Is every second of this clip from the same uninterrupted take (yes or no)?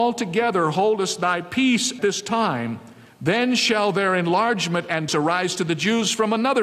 no